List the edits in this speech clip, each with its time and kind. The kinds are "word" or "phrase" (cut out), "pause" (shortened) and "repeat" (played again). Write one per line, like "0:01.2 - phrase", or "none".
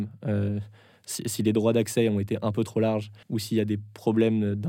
0:03.2 - pause